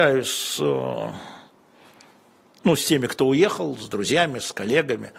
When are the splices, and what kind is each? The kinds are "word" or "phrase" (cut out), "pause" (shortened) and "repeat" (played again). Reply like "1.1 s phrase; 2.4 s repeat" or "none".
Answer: none